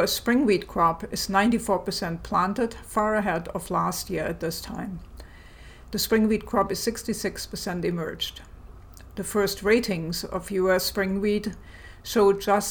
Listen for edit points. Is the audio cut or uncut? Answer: uncut